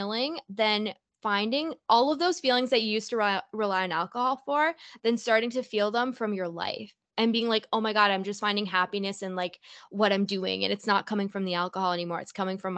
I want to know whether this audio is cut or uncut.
uncut